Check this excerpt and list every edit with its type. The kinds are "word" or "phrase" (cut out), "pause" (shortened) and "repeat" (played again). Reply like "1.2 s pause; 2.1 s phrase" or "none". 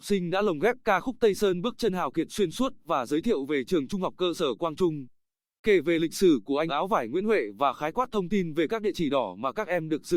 6.7 s word